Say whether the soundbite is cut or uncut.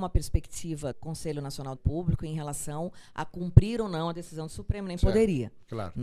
cut